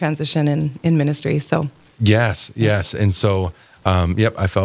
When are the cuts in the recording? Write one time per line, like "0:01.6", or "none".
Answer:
none